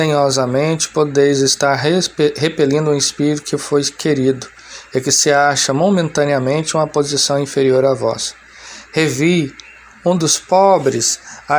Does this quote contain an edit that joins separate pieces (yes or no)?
no